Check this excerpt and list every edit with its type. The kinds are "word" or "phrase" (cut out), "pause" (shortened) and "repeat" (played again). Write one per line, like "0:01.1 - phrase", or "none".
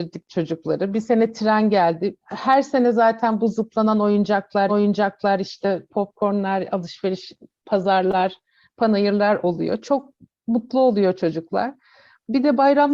0:02.2 - pause
0:04.7 - repeat